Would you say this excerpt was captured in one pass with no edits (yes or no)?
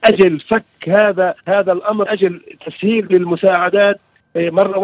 no